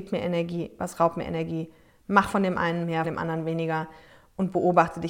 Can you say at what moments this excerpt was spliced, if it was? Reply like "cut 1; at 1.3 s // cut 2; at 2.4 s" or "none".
cut 1; at 3.0 s